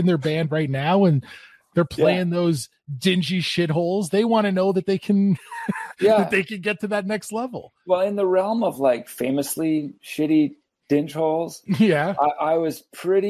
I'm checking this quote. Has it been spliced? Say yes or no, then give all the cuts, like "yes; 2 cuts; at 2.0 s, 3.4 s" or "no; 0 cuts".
no; 0 cuts